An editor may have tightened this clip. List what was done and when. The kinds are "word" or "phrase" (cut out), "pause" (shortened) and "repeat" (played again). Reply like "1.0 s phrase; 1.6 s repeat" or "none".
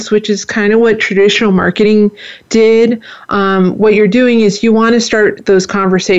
none